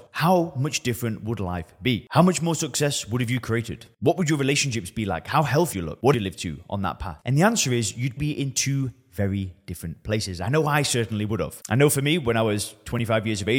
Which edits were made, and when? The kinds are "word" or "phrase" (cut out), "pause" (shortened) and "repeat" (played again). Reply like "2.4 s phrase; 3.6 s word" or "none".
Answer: 5.7 s word; 6.1 s phrase; 8.2 s word